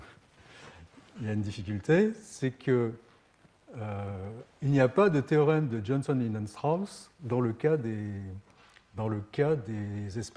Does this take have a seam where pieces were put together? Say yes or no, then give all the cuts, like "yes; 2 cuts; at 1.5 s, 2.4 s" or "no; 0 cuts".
no; 0 cuts